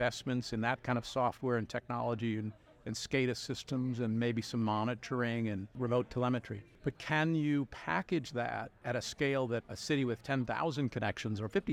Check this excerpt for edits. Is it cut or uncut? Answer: cut